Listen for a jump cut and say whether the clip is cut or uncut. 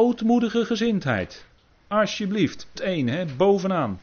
cut